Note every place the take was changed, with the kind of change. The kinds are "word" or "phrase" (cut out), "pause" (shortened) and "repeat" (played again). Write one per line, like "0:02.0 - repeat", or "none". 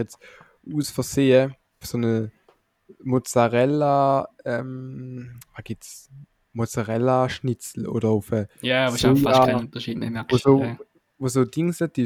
0:01.8 - phrase